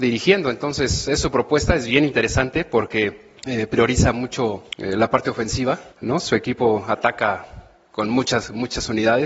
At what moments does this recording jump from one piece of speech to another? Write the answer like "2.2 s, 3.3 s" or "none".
3.4 s, 4.7 s, 5.9 s